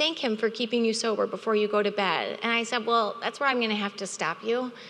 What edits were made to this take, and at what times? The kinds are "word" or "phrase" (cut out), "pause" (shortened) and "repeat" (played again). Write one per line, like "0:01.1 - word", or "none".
none